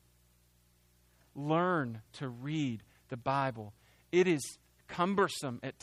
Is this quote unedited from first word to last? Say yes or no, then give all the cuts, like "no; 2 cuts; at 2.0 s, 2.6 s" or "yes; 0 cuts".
yes; 0 cuts